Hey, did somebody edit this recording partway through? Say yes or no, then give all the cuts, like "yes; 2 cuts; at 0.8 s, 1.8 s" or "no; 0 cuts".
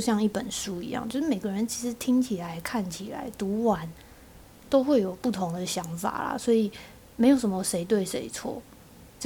no; 0 cuts